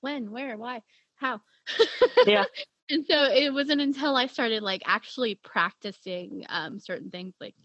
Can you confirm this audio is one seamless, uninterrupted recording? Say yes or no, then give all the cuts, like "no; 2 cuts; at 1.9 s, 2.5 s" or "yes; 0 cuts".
yes; 0 cuts